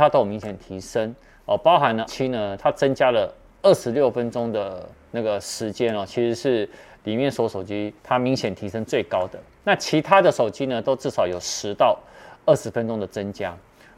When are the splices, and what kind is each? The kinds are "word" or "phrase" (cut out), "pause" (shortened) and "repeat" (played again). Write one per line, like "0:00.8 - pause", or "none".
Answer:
0:02.1 - word
0:08.0 - pause